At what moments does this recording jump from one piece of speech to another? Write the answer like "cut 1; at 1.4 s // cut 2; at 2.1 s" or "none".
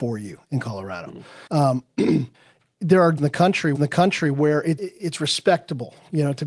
cut 1; at 1.5 s // cut 2; at 2.3 s // cut 3; at 3.2 s // cut 4; at 3.7 s // cut 5; at 4.8 s